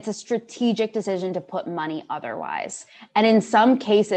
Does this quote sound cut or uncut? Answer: uncut